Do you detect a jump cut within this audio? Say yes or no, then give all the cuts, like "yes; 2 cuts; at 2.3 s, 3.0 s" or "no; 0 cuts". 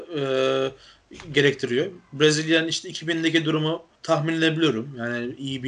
yes; 1 cut; at 3.9 s